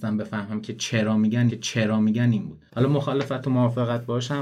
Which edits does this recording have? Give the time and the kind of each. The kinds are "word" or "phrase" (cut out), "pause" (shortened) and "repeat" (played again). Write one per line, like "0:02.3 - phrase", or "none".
0:01.5 - repeat
0:02.7 - pause

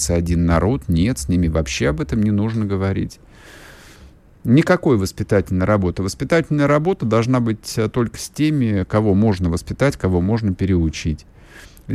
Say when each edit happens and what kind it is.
none

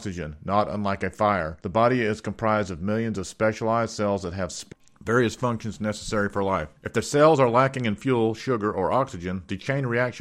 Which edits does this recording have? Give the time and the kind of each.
0:01.6 - pause
0:06.8 - pause

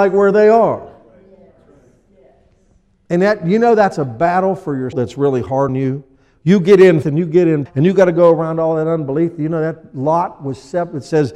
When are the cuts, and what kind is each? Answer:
0:04.9 - word
0:05.7 - word
0:07.0 - word
0:07.7 - word

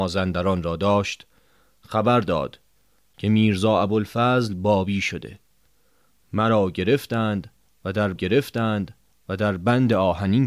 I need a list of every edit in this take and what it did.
0:08.2 - repeat

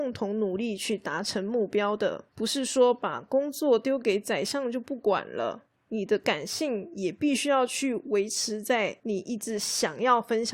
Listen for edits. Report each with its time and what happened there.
0:02.3 - pause
0:05.8 - pause

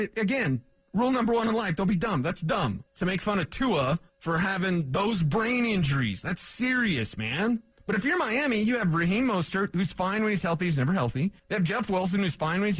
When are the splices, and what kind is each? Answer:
0:02.9 - pause
0:04.1 - pause
0:07.7 - pause
0:11.4 - pause

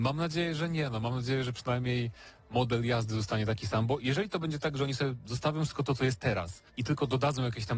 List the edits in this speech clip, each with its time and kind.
0:06.7 - pause

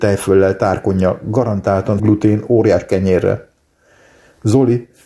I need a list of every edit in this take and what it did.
0:02.0 - word
0:02.9 - word

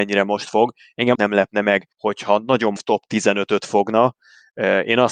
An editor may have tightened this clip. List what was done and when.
0:01.1 - word
0:01.9 - pause
0:02.8 - word

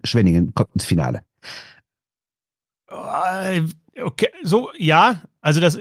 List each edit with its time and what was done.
0:04.3 - pause

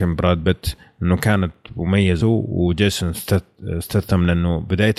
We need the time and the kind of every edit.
0:02.2 - word

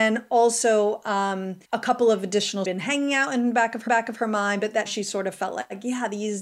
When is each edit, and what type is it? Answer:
0:01.6 - pause
0:02.6 - phrase
0:03.9 - repeat
0:04.9 - word

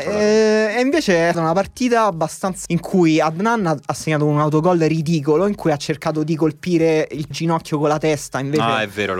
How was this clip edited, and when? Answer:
0:01.3 - word
0:02.7 - word
0:07.3 - word

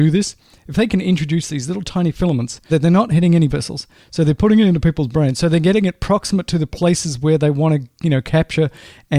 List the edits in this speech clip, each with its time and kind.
0:02.7 - word
0:03.5 - word

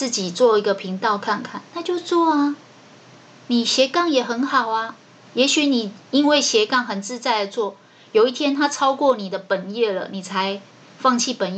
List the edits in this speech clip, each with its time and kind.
none

